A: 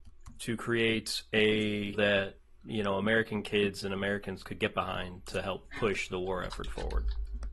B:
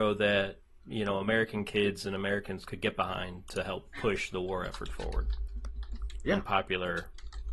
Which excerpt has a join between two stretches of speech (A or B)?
A